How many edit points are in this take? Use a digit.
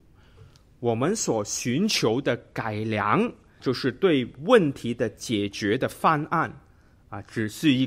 1